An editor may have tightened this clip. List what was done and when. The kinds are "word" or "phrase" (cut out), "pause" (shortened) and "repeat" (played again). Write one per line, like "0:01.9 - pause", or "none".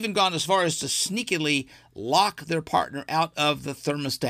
none